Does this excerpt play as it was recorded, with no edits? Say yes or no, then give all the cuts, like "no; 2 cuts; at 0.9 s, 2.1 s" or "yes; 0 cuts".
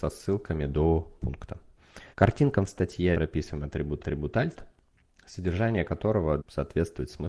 no; 5 cuts; at 1.2 s, 2.1 s, 3.1 s, 4.0 s, 6.4 s